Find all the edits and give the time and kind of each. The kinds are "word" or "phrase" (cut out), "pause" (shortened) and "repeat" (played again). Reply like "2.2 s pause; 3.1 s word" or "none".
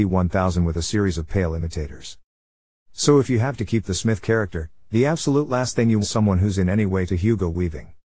6.0 s word; 7.1 s word

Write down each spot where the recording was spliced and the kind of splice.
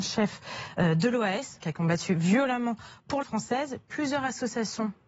1.6 s word; 3.2 s word

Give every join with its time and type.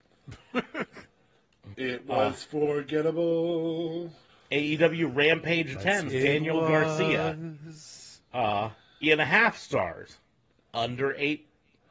1.7 s word; 5.7 s word; 6.1 s word; 9.0 s word

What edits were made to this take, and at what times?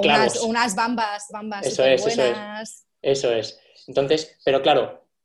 1.3 s word

